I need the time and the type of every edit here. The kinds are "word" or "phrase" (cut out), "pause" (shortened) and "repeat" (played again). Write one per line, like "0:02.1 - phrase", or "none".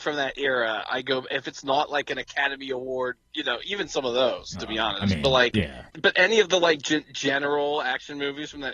0:05.9 - pause